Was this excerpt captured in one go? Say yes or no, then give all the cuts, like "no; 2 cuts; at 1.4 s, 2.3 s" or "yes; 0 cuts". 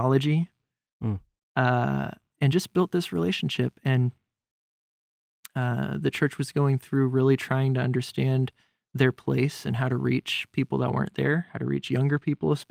yes; 0 cuts